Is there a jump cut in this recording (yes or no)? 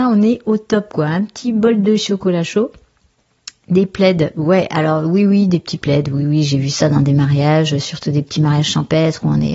no